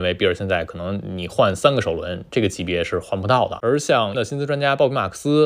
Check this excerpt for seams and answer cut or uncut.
cut